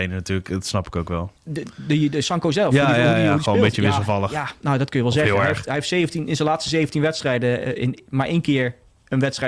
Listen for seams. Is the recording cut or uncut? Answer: cut